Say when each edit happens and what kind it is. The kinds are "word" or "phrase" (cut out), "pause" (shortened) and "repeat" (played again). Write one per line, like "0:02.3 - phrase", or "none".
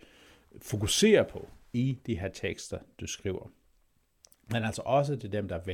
none